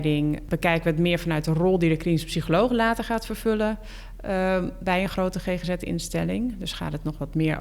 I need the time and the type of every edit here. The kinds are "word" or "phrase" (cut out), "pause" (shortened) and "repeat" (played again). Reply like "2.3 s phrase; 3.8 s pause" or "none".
none